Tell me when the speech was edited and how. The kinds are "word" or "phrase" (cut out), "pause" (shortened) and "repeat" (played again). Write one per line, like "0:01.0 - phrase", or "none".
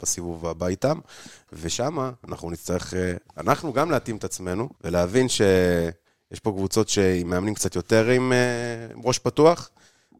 0:04.7 - pause

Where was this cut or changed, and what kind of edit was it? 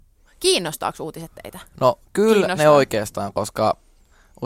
none

